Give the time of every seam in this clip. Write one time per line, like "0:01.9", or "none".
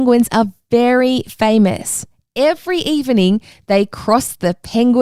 none